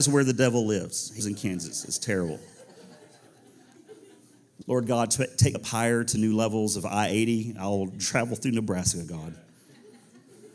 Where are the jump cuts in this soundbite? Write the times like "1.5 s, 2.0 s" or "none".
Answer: 1.2 s, 4.6 s, 5.5 s

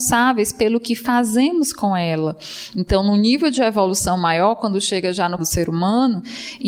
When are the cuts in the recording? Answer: 5.4 s

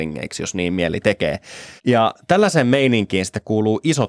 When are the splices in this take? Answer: 1.8 s

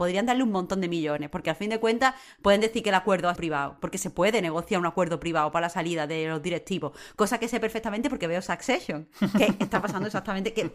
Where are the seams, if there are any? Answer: 3.4 s

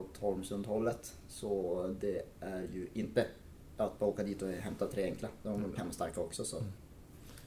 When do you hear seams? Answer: 5.8 s

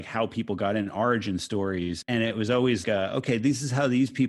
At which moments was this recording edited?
2.0 s, 2.8 s

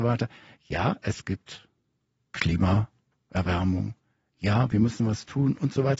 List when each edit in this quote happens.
none

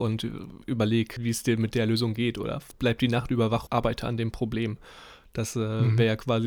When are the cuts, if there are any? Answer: 3.7 s

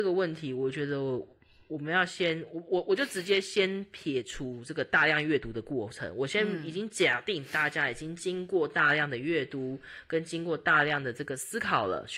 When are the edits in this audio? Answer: none

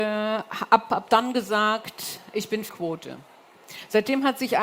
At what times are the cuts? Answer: 2.7 s

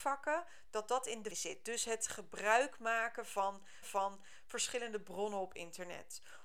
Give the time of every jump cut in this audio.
1.3 s, 3.8 s

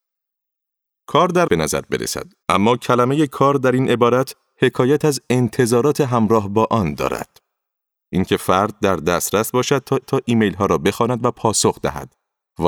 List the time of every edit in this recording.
1.5 s, 2.4 s, 10.0 s

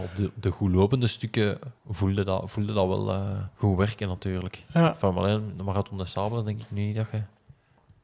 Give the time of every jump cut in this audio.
1.8 s, 3.5 s

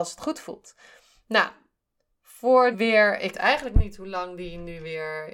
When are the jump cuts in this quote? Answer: 2.7 s, 3.3 s

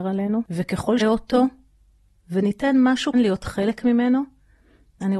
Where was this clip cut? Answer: 1.0 s, 3.1 s

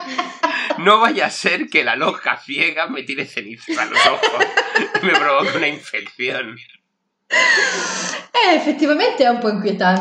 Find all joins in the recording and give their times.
none

